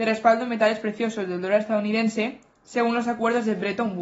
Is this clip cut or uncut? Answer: uncut